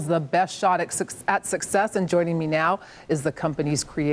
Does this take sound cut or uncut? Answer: uncut